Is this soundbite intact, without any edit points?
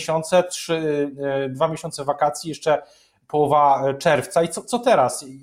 yes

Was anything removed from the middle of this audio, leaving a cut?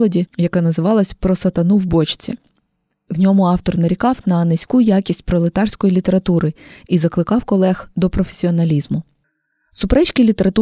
no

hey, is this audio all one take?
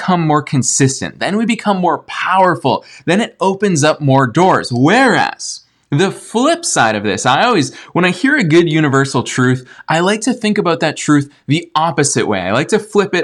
yes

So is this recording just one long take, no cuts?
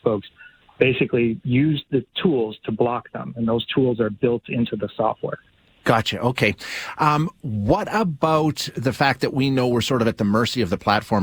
yes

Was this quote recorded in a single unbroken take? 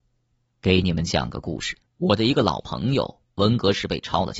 no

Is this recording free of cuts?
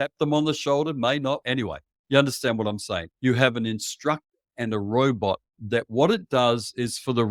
no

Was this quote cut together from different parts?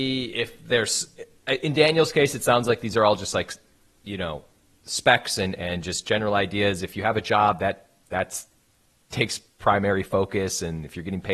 no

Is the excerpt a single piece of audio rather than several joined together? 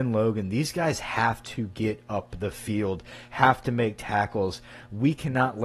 yes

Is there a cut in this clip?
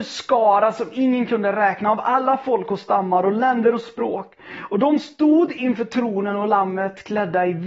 no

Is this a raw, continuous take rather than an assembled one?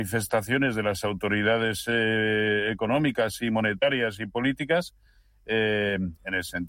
yes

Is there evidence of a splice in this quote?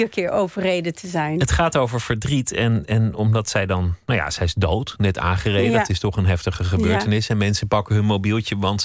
no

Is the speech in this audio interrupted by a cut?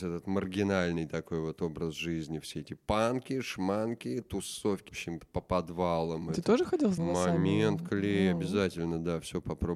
yes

